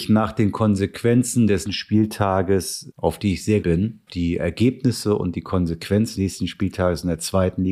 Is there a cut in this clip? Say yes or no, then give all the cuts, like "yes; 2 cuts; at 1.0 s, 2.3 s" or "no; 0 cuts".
yes; 5 cuts; at 1.7 s, 2.9 s, 3.6 s, 4.1 s, 6.1 s